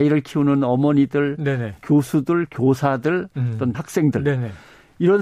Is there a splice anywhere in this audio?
yes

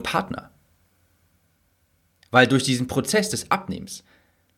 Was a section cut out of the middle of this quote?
no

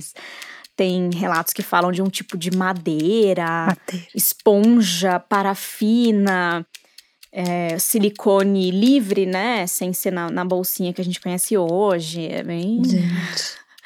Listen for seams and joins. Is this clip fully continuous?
yes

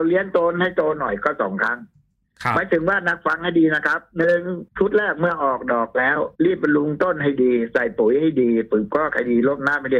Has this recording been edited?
yes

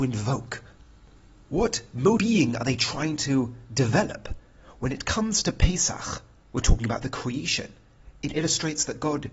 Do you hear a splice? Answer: yes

